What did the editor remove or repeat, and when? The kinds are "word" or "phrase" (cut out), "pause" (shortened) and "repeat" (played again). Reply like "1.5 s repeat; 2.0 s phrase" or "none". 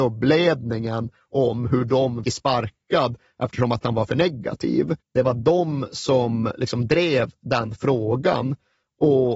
2.2 s phrase; 5.0 s pause